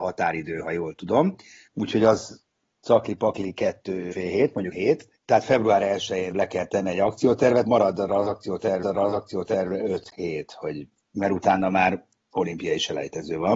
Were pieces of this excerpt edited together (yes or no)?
yes